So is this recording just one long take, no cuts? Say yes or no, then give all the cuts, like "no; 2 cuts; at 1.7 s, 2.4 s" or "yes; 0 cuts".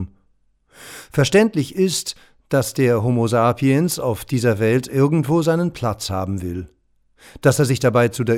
yes; 0 cuts